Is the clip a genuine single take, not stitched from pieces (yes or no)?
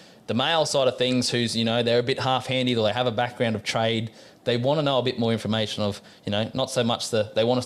yes